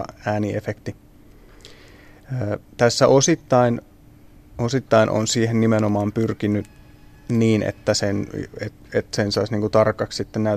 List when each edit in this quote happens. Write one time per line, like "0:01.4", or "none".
0:02.7